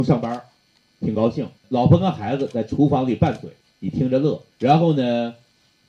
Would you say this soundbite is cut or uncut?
cut